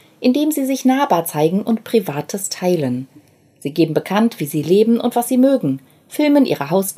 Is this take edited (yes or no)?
no